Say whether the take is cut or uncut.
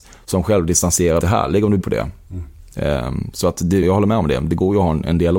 cut